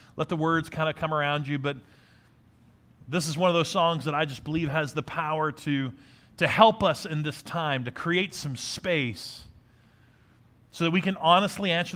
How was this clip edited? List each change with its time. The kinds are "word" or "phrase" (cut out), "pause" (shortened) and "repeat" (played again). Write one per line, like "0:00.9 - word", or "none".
none